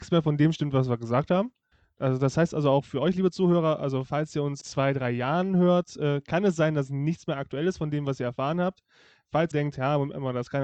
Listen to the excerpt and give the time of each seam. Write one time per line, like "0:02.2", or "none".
0:04.6
0:09.5